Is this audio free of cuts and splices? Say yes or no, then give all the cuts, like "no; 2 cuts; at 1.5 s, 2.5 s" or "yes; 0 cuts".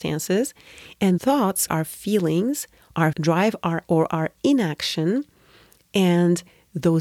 no; 4 cuts; at 1.2 s, 1.7 s, 3.1 s, 3.8 s